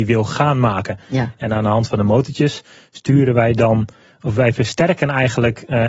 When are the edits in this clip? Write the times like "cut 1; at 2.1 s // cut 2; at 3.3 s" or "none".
none

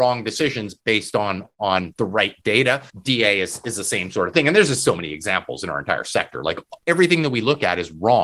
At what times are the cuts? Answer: cut 1; at 2.9 s

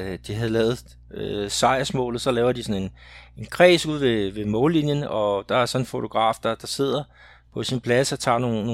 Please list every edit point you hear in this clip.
none

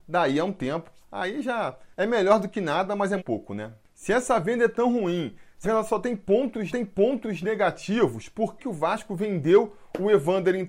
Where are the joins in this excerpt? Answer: cut 1; at 1.9 s // cut 2; at 3.2 s // cut 3; at 5.6 s // cut 4; at 6.7 s // cut 5; at 8.6 s

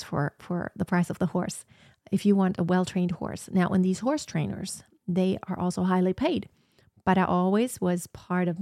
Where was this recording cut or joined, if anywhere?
none

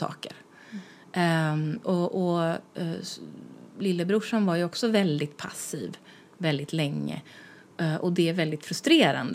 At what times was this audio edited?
none

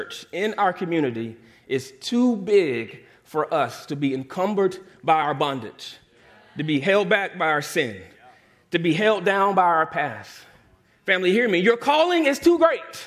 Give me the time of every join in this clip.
none

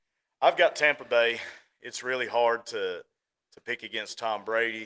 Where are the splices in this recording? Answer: none

